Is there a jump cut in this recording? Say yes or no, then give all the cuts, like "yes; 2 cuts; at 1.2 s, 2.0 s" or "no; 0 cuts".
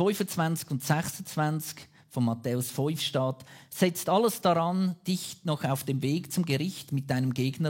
no; 0 cuts